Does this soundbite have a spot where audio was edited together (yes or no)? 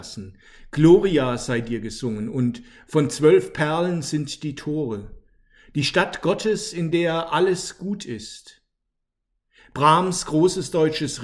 no